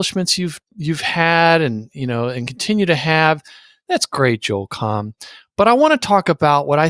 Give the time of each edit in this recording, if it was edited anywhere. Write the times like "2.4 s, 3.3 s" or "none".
none